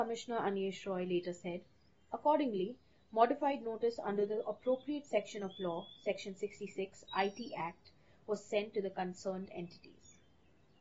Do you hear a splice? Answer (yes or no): no